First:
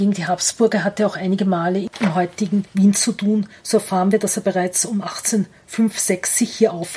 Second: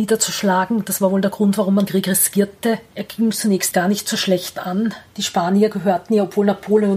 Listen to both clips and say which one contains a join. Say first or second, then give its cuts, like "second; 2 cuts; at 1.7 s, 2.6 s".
second; 2 cuts; at 1.9 s, 3.7 s